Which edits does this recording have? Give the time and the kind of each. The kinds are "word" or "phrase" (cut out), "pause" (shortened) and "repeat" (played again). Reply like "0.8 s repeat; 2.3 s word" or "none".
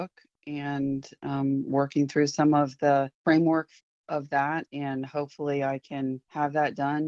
none